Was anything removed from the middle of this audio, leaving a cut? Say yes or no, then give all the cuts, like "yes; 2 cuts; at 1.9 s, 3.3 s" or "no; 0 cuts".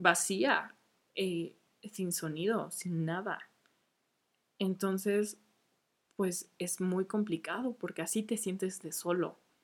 no; 0 cuts